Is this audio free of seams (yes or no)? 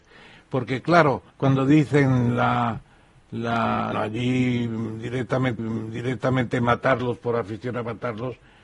no